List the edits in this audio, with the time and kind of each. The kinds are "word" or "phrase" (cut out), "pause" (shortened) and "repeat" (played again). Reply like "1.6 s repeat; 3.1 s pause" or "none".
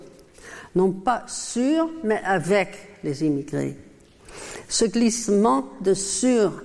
none